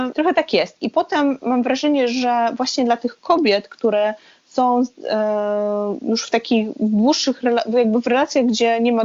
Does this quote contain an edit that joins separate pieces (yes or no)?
no